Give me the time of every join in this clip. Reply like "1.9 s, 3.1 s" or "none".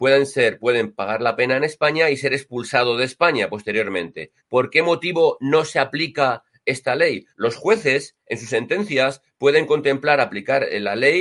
4.4 s, 7.3 s